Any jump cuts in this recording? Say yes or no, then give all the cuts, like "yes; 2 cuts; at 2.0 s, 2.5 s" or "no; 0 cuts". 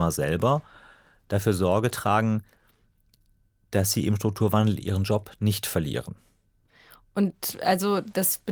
yes; 1 cut; at 4.8 s